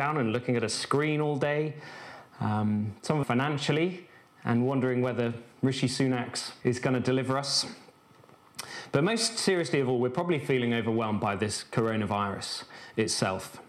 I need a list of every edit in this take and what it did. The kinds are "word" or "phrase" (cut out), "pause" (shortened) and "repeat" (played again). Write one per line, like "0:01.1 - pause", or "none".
0:03.2 - phrase
0:05.5 - pause
0:06.6 - phrase